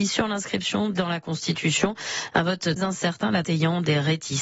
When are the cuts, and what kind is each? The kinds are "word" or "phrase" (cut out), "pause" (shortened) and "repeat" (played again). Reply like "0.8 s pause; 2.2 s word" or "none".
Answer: 0.9 s word; 2.8 s word; 3.4 s word